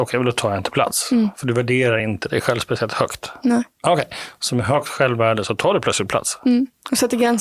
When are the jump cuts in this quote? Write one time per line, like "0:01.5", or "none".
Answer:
none